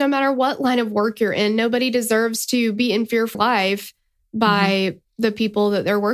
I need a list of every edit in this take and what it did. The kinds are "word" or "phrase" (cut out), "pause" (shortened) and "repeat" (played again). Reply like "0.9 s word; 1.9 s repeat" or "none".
3.3 s word